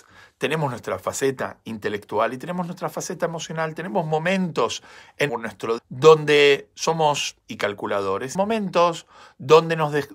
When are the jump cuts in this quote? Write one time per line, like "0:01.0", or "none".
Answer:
0:05.3
0:05.8
0:07.4
0:08.3